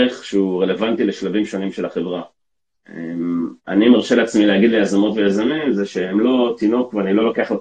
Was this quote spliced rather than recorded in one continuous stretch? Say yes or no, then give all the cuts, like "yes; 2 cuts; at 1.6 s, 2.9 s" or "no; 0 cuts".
no; 0 cuts